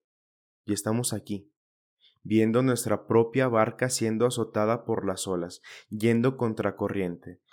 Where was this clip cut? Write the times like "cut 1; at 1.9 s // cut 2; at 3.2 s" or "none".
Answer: none